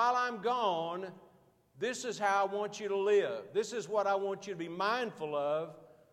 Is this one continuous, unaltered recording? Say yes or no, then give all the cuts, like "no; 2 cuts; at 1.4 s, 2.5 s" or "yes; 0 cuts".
yes; 0 cuts